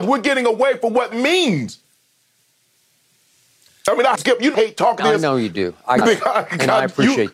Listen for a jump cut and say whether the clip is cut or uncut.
cut